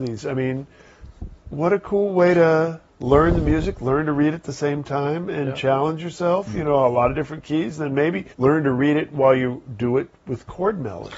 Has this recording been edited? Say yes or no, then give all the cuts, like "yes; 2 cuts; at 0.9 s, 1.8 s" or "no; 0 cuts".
yes; 3 cuts; at 2.9 s, 8.3 s, 10.2 s